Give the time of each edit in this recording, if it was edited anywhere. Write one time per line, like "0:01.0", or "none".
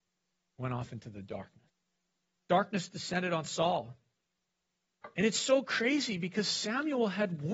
0:01.7